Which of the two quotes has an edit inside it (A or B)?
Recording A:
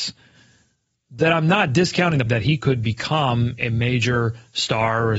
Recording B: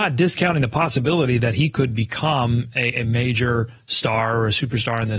A